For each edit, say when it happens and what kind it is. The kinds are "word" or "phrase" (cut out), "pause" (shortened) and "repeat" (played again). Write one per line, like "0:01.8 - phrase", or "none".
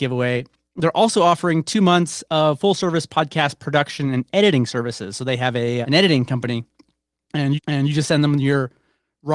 0:05.8 - word
0:07.6 - repeat